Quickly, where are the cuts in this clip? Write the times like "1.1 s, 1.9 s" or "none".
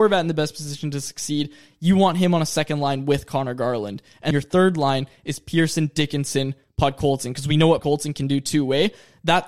4.3 s, 7.8 s

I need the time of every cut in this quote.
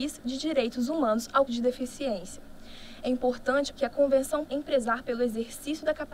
1.5 s, 3.7 s, 4.5 s

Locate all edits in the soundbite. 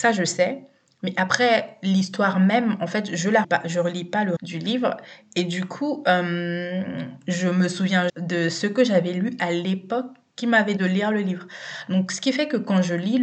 3.4 s, 4.4 s, 8.1 s, 10.8 s

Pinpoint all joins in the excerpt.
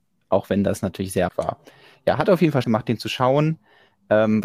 1.3 s, 2.6 s

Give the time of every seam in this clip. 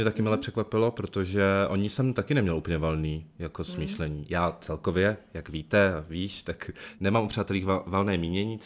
none

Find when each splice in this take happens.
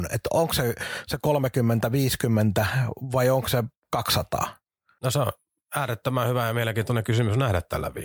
none

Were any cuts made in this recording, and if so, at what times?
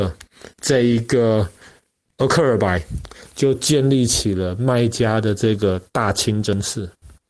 none

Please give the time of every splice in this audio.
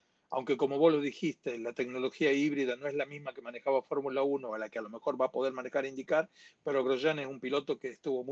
none

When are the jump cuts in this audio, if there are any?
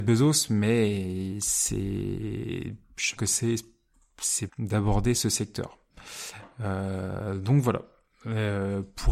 3.2 s, 4.5 s

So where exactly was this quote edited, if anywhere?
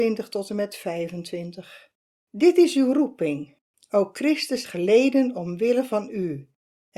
2.1 s, 3.7 s, 4.6 s

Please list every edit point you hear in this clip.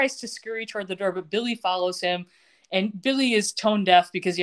none

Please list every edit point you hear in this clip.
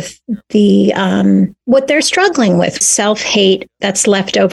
1.6 s, 2.0 s, 2.8 s

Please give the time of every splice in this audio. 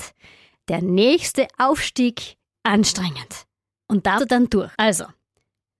2.5 s, 4.2 s, 4.7 s

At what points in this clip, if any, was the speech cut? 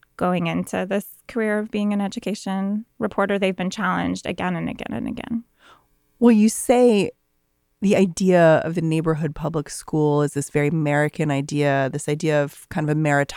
none

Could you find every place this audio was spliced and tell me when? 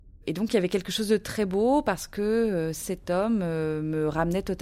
none

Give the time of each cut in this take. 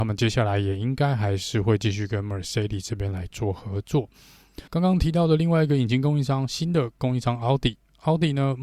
4.7 s

